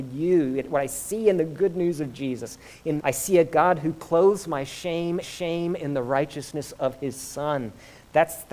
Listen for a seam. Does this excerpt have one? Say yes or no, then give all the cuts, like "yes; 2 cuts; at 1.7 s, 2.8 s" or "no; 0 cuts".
yes; 2 cuts; at 3.0 s, 5.2 s